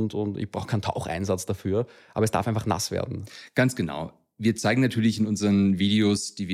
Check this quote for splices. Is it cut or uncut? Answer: uncut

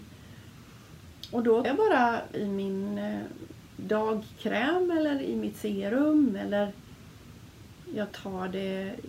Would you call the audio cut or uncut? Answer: cut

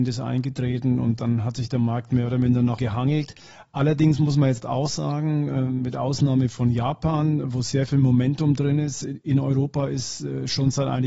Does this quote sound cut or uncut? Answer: cut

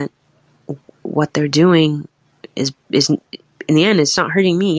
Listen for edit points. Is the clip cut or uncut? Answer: uncut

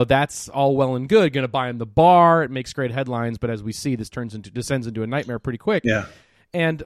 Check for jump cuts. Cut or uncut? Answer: uncut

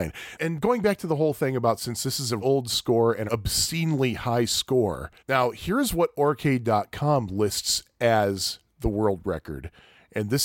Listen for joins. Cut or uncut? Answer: cut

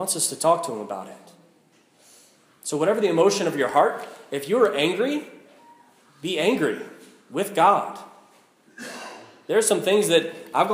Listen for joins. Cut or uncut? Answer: uncut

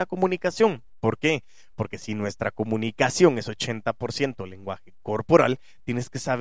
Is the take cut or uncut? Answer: uncut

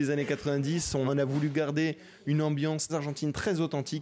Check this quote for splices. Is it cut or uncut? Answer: cut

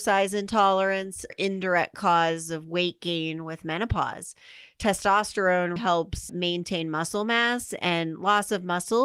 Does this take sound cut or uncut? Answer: cut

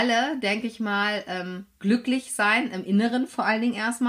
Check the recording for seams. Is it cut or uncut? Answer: uncut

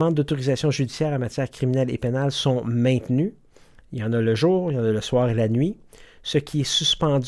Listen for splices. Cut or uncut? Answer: uncut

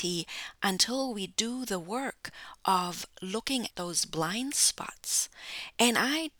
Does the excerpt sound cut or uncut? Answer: cut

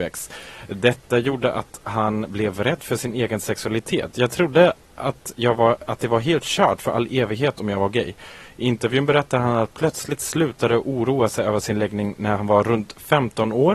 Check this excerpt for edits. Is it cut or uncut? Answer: uncut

